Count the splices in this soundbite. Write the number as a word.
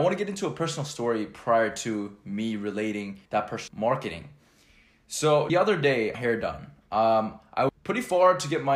five